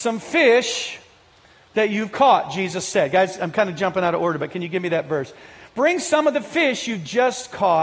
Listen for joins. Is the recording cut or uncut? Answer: uncut